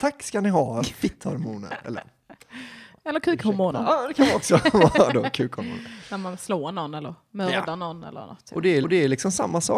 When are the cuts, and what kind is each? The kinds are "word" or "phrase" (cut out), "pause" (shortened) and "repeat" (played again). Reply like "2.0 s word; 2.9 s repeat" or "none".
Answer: 8.8 s repeat